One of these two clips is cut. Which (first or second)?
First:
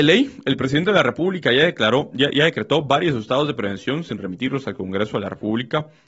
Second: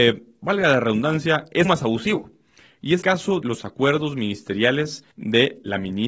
second